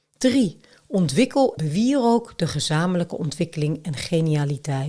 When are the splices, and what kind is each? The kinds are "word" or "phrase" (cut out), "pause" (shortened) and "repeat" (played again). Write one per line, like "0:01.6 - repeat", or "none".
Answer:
0:01.6 - word